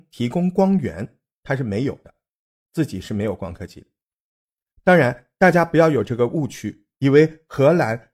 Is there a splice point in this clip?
no; 0 cuts

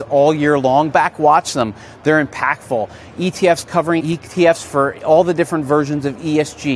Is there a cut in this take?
yes; 2 cuts; at 0.9 s, 4.0 s

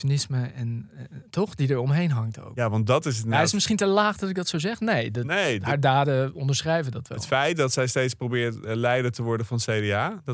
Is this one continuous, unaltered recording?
yes; 0 cuts

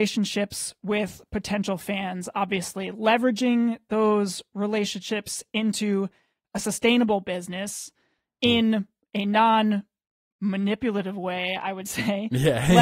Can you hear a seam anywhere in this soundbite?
no; 0 cuts

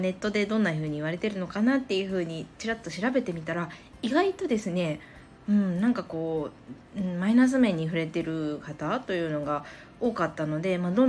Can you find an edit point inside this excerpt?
no; 0 cuts

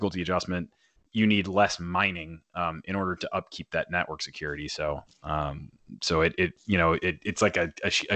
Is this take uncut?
no; 1 cut; at 1.0 s

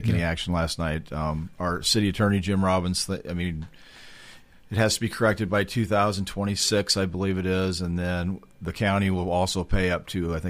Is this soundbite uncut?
yes; 0 cuts

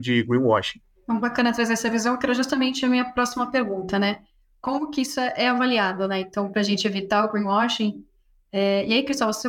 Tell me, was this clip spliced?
yes; 1 cut; at 1.0 s

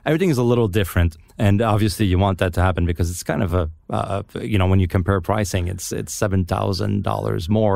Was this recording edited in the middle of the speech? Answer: no; 0 cuts

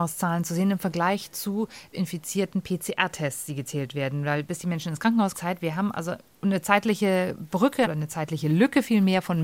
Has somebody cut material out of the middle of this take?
yes; 2 cuts; at 1.9 s, 5.3 s

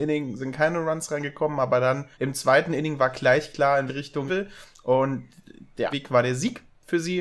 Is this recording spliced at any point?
yes; 4 cuts; at 2.1 s, 3.9 s, 4.3 s, 5.9 s

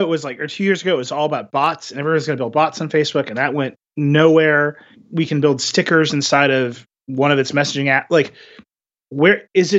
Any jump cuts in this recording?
no; 0 cuts

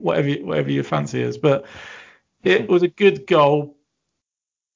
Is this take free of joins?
yes; 0 cuts

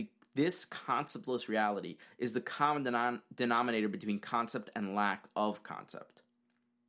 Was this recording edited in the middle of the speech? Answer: no; 0 cuts

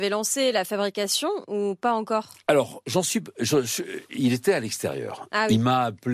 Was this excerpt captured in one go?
yes; 0 cuts

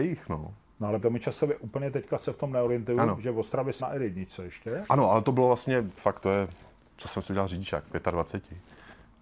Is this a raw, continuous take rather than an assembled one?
no; 3 cuts; at 1.0 s, 3.8 s, 6.0 s

